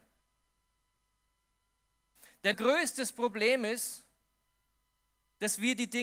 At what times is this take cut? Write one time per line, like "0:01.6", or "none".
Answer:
0:02.5